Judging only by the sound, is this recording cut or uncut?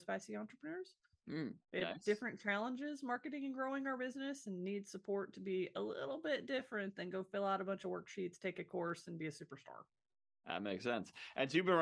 uncut